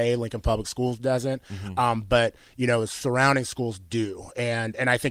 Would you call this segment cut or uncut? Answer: uncut